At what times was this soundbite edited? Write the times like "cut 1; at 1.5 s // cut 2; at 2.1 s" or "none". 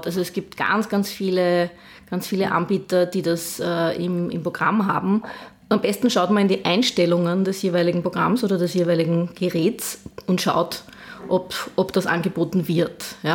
none